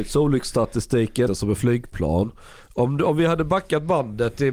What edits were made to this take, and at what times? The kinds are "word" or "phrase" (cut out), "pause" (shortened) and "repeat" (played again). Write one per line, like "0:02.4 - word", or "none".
0:01.3 - phrase